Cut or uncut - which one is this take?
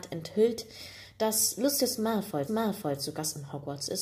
cut